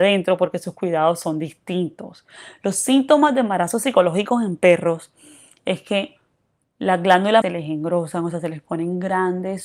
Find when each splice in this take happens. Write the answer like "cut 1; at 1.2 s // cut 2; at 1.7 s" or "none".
cut 1; at 7.4 s